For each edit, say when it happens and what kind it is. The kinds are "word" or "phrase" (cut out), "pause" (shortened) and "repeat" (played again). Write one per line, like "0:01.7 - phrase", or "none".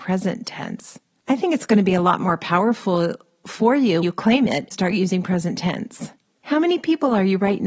0:04.0 - word
0:04.7 - word